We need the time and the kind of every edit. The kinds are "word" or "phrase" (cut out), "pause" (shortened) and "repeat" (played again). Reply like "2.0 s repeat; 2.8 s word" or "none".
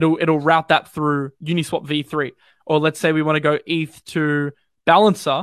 none